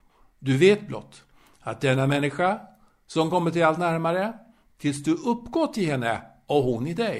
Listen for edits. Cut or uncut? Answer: uncut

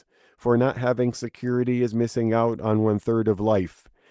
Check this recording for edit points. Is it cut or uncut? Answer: uncut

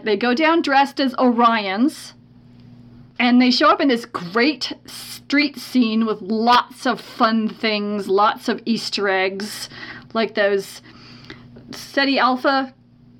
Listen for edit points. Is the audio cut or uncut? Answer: uncut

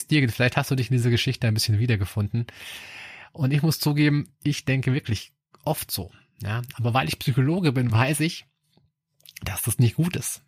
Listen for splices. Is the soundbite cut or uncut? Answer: uncut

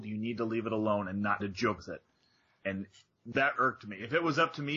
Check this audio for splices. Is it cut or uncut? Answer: cut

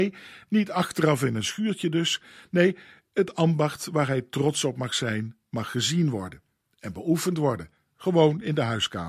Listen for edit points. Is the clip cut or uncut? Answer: uncut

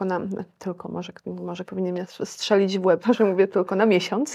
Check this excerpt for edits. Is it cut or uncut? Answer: cut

